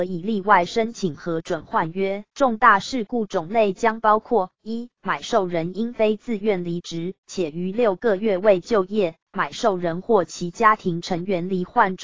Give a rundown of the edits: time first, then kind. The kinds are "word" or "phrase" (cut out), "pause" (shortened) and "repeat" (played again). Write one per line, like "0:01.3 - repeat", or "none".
0:02.3 - pause
0:09.2 - word